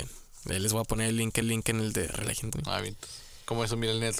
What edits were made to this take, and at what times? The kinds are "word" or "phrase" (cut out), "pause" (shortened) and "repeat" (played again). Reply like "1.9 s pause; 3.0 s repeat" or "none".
1.4 s repeat; 2.5 s word